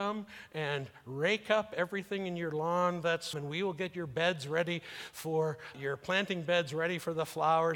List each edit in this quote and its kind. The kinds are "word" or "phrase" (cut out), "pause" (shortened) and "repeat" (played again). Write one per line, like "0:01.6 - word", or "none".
0:03.3 - phrase
0:05.7 - word